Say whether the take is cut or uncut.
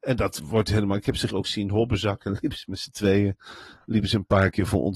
cut